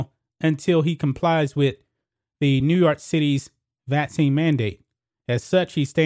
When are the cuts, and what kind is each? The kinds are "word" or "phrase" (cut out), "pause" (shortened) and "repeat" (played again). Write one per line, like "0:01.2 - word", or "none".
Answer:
none